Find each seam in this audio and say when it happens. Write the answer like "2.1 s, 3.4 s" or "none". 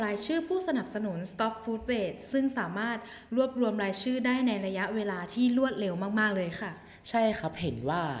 none